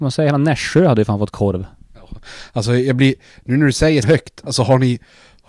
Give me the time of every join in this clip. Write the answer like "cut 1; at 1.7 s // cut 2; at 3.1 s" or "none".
cut 1; at 4.0 s